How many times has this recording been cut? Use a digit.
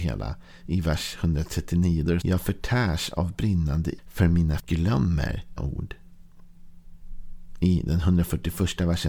4